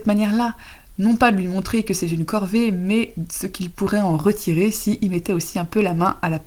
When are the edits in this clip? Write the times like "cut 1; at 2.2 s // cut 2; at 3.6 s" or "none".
none